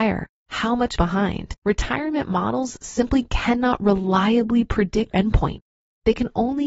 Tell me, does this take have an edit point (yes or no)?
yes